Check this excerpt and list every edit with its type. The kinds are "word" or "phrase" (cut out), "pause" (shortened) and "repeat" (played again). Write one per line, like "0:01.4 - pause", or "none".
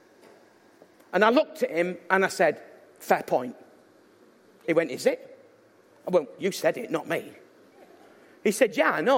0:06.4 - word

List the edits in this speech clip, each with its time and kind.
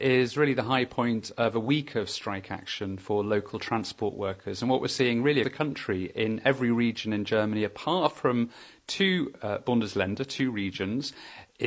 0:05.4 - word

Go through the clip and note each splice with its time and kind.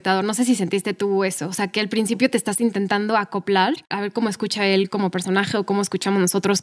0:03.8 - pause

